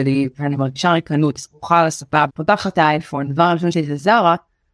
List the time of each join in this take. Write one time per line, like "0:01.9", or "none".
0:01.4
0:02.3
0:03.4
0:03.7